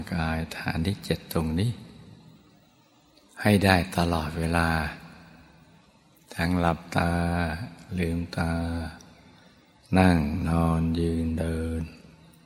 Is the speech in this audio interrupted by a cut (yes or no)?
no